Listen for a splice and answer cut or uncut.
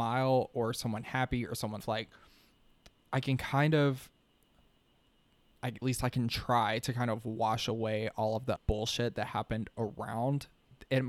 cut